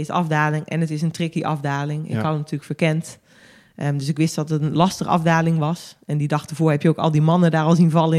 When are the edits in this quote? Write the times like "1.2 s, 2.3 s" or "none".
none